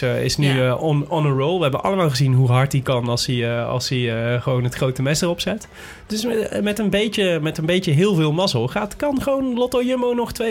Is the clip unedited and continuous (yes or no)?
yes